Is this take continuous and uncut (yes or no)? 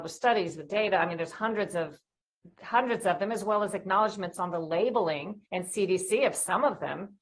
no